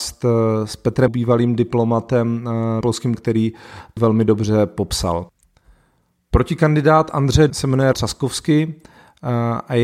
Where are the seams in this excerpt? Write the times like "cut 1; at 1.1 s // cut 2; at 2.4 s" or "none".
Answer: cut 1; at 1.1 s // cut 2; at 2.8 s // cut 3; at 3.1 s // cut 4; at 4.0 s // cut 5; at 7.5 s // cut 6; at 7.9 s